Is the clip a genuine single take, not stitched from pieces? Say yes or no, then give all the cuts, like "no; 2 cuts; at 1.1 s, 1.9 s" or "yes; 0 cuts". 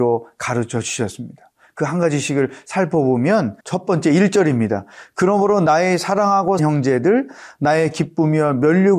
no; 2 cuts; at 3.6 s, 6.6 s